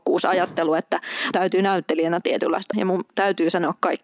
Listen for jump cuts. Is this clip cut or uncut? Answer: cut